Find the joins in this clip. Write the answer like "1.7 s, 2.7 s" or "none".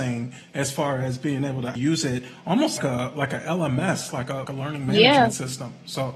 1.8 s, 2.8 s, 4.5 s